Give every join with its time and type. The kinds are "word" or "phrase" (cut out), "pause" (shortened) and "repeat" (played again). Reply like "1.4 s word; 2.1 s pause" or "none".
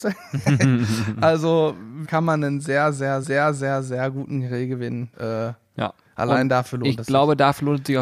2.0 s phrase; 3.2 s repeat; 5.1 s pause